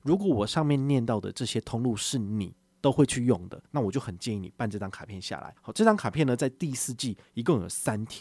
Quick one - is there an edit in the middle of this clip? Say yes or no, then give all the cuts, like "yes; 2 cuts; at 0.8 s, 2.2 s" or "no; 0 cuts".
yes; 2 cuts; at 3.7 s, 5.6 s